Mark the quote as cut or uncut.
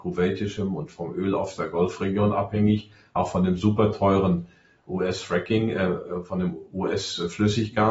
uncut